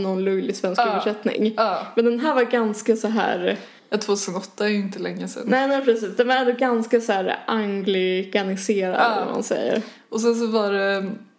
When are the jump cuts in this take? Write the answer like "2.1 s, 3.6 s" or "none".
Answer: none